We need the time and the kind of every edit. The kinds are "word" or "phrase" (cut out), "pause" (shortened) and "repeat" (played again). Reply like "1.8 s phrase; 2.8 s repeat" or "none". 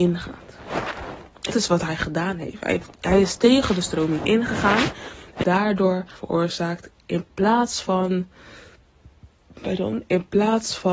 1.5 s word; 5.4 s word; 6.2 s word